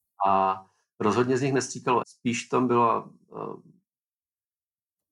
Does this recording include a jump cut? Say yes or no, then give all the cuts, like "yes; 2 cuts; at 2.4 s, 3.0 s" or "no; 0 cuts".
yes; 1 cut; at 2.0 s